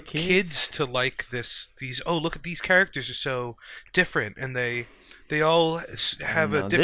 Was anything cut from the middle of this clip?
no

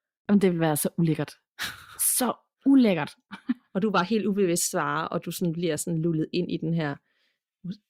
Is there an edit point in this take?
no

